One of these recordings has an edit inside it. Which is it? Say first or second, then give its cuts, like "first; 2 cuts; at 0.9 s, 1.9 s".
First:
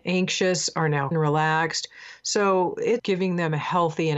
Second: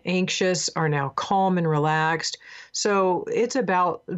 first; 2 cuts; at 1.1 s, 3.0 s